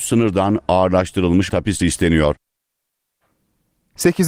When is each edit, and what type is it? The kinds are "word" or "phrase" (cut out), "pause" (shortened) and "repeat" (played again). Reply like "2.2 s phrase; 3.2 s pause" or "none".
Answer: 1.5 s word; 1.8 s word